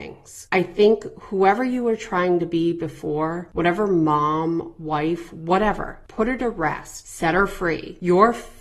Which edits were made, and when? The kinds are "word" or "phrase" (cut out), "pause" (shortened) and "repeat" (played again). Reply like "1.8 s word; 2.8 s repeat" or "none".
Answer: none